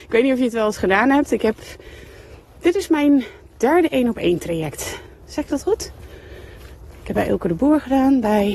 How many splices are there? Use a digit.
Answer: 0